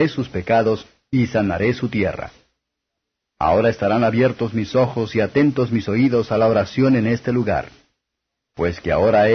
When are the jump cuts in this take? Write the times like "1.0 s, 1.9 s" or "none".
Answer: none